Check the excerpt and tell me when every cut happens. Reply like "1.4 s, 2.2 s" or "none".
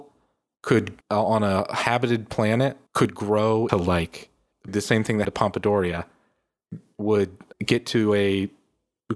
1.0 s, 2.9 s, 3.7 s, 4.7 s, 5.2 s, 7.5 s

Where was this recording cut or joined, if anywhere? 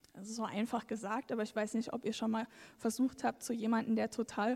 none

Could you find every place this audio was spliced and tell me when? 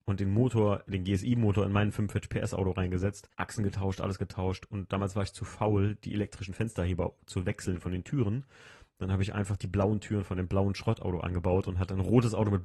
3.3 s

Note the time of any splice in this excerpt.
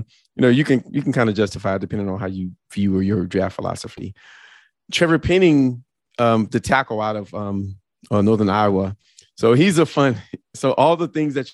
none

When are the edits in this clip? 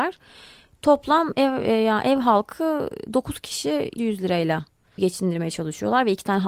4.0 s, 5.0 s

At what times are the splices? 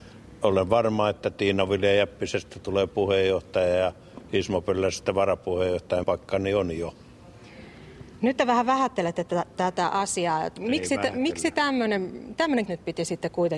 6.0 s, 12.7 s

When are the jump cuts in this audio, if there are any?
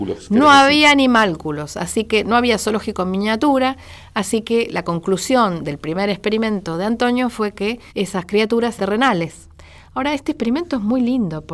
7.9 s, 8.8 s

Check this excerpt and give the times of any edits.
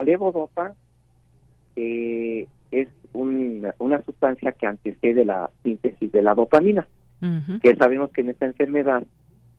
none

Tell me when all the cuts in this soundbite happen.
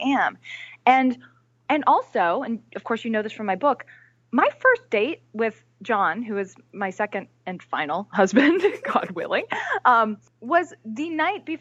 10.3 s

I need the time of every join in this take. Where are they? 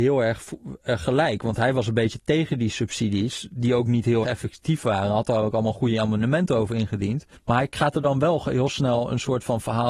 4.2 s, 7.4 s

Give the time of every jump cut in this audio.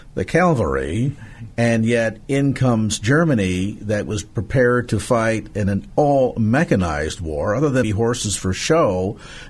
7.8 s

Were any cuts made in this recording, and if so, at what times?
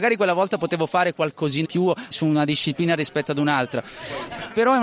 1.6 s, 2.1 s

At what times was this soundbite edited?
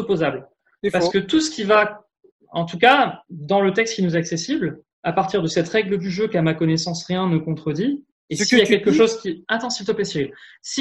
4.9 s

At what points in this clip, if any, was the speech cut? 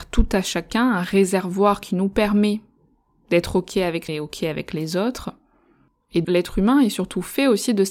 4.1 s, 6.2 s

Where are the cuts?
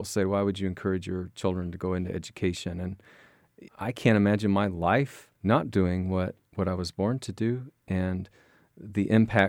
3.7 s, 5.4 s

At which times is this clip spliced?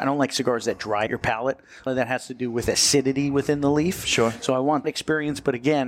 1.1 s, 1.9 s, 4.8 s

